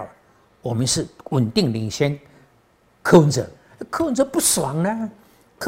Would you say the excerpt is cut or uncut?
uncut